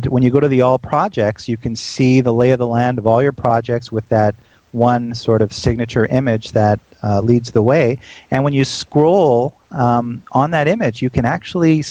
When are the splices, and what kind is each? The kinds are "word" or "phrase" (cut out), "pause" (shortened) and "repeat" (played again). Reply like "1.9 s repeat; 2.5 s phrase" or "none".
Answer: none